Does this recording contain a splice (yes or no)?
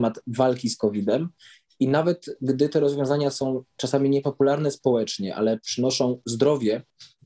no